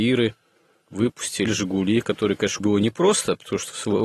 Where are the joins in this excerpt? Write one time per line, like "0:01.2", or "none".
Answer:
0:01.5
0:02.6